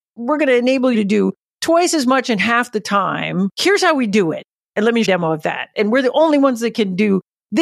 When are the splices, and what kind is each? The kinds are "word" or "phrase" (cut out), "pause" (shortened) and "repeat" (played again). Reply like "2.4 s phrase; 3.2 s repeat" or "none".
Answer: 0.9 s word; 3.5 s pause; 5.0 s phrase